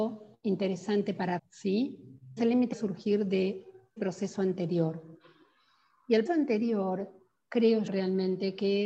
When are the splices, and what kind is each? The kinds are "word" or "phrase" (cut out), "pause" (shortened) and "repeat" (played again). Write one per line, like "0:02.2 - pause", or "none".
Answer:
0:01.4 - word
0:02.4 - word
0:02.7 - word
0:04.0 - word
0:06.3 - word
0:07.9 - word